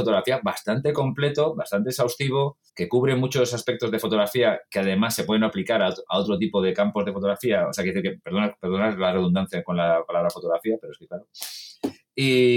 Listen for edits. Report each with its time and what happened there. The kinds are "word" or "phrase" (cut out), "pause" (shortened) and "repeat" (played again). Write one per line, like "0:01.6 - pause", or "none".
0:02.7 - pause